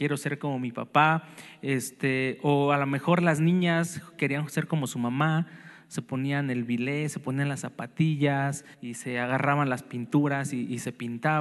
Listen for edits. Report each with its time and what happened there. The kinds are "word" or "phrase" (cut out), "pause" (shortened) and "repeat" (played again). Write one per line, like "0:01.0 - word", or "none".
0:08.7 - pause